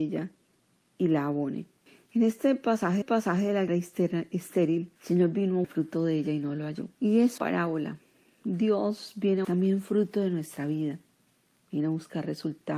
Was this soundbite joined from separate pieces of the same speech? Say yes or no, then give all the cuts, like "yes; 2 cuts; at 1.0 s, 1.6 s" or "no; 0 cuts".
yes; 8 cuts; at 1.9 s, 3.0 s, 3.7 s, 5.0 s, 5.6 s, 6.9 s, 7.4 s, 9.4 s